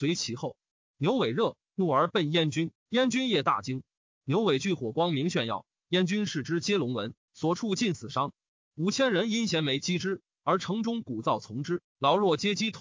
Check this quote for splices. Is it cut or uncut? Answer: uncut